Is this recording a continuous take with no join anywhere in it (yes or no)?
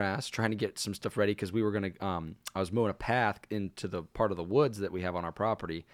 yes